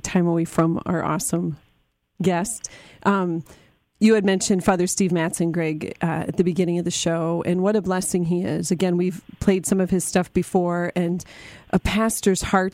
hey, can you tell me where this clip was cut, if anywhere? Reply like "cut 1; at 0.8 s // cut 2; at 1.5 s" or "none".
none